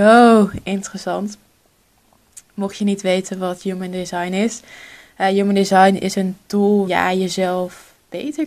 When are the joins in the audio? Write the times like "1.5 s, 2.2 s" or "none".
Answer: 6.9 s